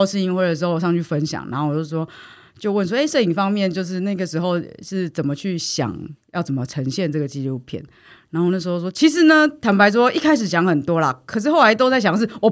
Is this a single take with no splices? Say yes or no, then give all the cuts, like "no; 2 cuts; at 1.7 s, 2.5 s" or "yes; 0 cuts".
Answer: yes; 0 cuts